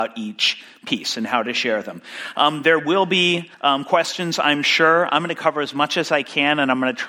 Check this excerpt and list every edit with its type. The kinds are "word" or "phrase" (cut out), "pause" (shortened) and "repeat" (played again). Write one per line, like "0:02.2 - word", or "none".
0:03.5 - pause